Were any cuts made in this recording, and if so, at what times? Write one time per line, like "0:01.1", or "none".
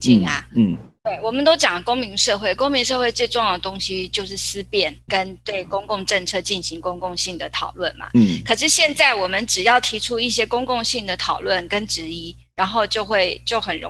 0:01.0
0:02.6
0:05.1